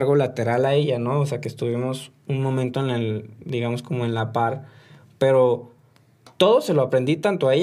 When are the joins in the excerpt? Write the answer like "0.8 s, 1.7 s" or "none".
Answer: none